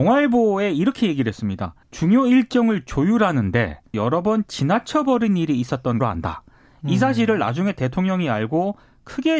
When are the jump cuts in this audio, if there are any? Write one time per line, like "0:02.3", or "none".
0:01.8
0:03.9
0:06.0